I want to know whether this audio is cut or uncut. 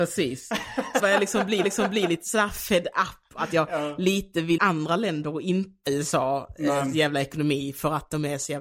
cut